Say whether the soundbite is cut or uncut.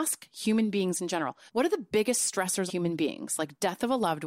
cut